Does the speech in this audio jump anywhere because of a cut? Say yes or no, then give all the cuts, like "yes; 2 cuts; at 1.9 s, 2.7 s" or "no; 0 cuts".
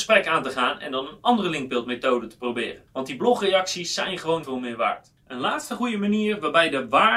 yes; 3 cuts; at 2.9 s, 4.4 s, 5.2 s